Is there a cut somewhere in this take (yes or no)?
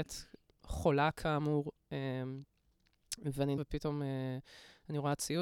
yes